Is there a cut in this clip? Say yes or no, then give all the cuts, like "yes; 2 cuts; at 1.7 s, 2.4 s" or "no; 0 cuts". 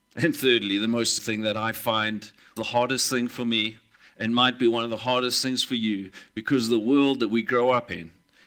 yes; 2 cuts; at 1.2 s, 2.6 s